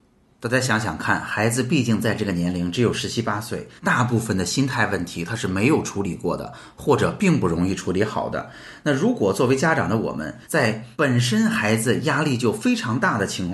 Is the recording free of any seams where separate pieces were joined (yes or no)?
no